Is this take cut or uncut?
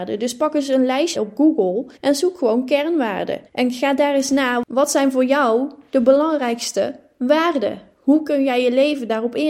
cut